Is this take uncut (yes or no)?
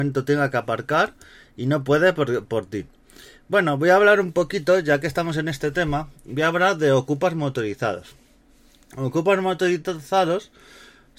yes